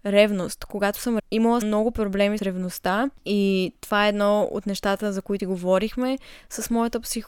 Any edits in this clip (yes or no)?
yes